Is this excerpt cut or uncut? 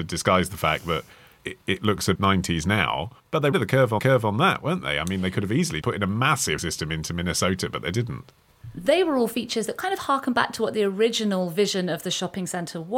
cut